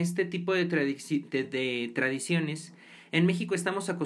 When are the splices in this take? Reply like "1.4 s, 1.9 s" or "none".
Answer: none